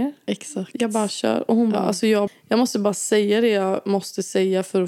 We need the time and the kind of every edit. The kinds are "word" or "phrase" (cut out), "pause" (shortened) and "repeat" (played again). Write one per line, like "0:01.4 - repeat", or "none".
0:02.3 - word